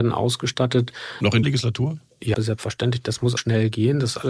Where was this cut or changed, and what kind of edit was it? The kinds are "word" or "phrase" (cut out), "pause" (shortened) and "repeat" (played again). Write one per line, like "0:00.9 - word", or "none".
0:01.4 - word
0:02.3 - word
0:03.4 - word